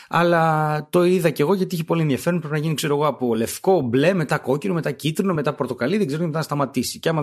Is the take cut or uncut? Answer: uncut